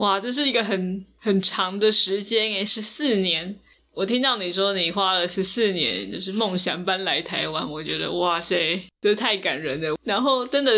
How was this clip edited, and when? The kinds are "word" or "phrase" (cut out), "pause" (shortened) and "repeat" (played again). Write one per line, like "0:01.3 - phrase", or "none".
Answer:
none